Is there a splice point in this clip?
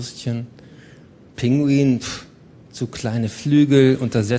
no; 0 cuts

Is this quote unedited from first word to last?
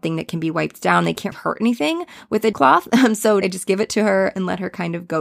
no; 3 cuts; at 1.3 s, 2.5 s, 3.4 s

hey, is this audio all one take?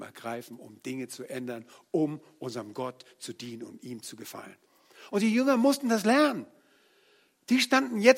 yes; 0 cuts

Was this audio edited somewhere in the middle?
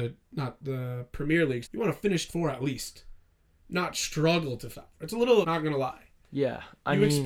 yes; 4 cuts; at 1.6 s, 2.3 s, 4.7 s, 5.4 s

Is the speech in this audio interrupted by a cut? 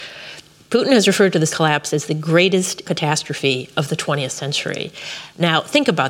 yes; 2 cuts; at 1.5 s, 2.8 s

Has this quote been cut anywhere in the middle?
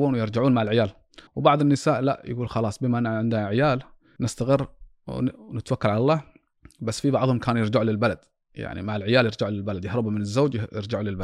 yes; 1 cut; at 1.3 s

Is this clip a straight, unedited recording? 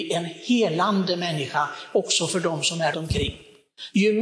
no; 1 cut; at 2.9 s

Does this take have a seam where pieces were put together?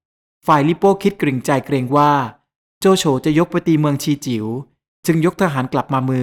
no; 0 cuts

